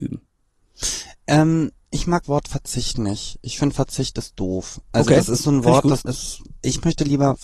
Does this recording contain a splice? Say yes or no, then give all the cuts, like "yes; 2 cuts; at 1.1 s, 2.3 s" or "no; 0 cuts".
yes; 2 cuts; at 2.2 s, 6.0 s